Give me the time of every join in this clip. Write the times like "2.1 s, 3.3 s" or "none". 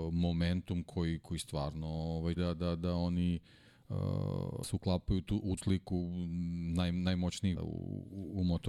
2.4 s, 4.6 s, 5.6 s, 7.6 s